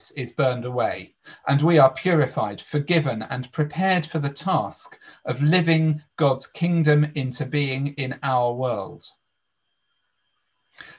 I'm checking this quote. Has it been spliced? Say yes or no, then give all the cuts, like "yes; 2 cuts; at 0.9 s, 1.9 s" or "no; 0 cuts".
no; 0 cuts